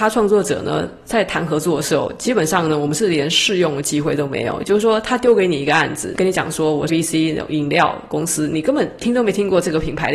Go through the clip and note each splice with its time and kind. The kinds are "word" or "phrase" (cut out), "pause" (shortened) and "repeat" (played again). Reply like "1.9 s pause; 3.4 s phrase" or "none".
6.9 s word